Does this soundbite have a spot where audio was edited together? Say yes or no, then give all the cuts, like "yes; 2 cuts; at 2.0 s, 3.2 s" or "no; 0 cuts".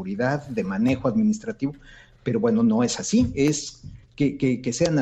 no; 0 cuts